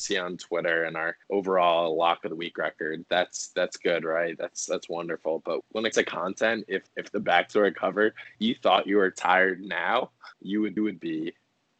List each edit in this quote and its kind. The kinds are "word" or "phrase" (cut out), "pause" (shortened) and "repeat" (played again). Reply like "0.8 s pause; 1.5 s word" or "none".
1.2 s pause; 5.6 s word; 5.9 s word; 6.9 s pause; 7.2 s phrase; 8.4 s word; 10.3 s pause; 10.8 s repeat